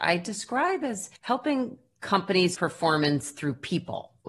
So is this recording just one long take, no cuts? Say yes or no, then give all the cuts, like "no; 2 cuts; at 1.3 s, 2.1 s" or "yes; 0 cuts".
no; 2 cuts; at 1.2 s, 2.5 s